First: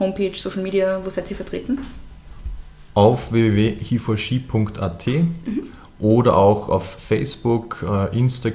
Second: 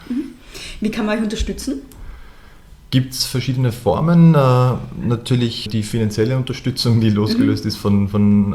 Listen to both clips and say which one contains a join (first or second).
second